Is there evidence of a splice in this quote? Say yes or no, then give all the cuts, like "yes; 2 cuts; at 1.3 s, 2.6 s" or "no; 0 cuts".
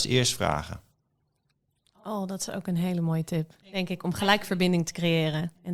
yes; 1 cut; at 3.6 s